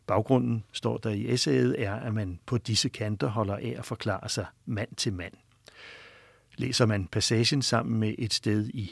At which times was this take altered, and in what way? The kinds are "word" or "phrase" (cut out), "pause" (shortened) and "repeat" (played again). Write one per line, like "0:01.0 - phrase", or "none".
none